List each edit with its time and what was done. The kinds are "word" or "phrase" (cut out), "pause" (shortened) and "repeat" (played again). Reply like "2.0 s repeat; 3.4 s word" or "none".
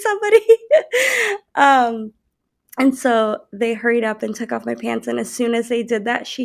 none